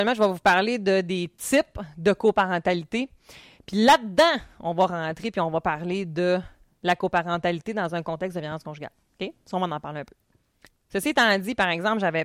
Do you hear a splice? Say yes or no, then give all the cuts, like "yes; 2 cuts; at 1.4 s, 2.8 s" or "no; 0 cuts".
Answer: no; 0 cuts